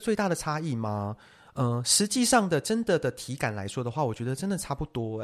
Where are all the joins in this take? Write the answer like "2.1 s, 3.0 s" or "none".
none